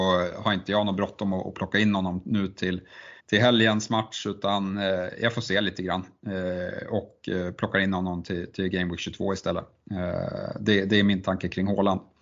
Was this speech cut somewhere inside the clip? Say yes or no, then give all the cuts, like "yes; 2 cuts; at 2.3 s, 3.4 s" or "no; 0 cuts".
yes; 1 cut; at 3.2 s